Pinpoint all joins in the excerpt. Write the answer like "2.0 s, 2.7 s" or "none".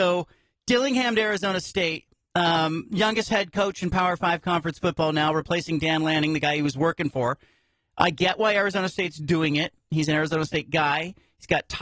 none